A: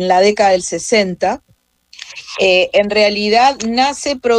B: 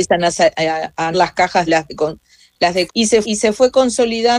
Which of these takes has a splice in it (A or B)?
B